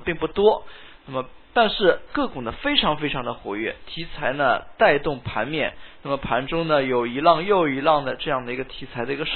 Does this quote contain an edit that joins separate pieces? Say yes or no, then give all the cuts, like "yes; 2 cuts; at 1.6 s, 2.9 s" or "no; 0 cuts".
yes; 1 cut; at 1.4 s